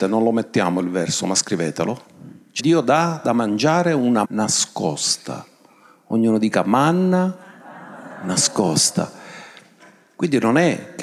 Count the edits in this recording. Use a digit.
2